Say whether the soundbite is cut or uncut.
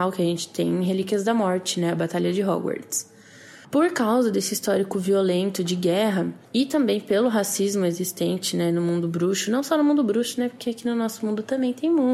cut